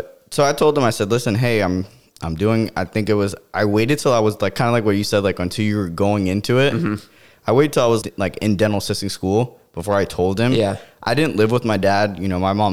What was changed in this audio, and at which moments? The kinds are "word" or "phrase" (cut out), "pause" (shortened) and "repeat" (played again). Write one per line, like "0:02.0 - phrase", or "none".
0:08.0 - word